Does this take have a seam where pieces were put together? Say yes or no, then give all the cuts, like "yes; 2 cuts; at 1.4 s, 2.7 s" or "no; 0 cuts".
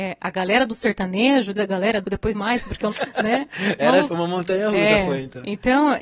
yes; 5 cuts; at 1.6 s, 2.0 s, 2.3 s, 2.9 s, 4.1 s